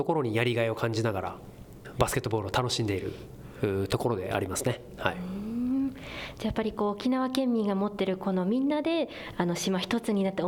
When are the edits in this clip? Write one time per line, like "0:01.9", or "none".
none

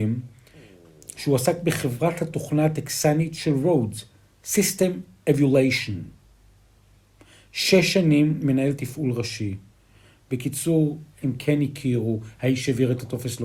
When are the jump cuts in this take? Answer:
none

